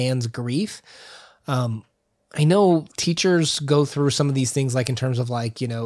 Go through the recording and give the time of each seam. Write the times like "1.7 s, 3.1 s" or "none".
none